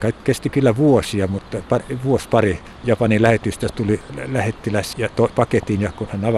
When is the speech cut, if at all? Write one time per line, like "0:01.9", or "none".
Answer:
0:02.8
0:04.1
0:04.9
0:05.3